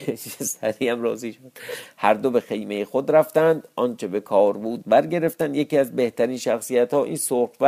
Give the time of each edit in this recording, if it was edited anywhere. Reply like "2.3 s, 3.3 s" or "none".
none